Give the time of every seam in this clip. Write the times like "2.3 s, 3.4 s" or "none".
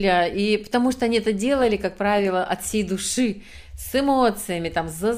none